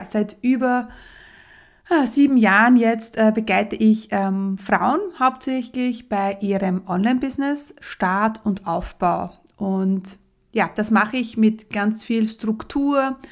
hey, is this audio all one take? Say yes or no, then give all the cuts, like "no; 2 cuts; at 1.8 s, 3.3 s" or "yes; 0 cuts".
yes; 0 cuts